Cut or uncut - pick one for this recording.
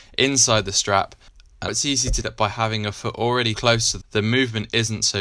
cut